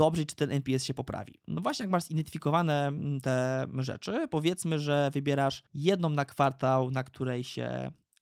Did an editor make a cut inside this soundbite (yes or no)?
yes